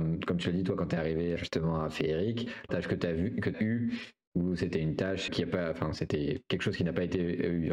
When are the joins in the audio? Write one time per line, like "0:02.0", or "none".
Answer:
0:01.4
0:02.7
0:03.5
0:05.3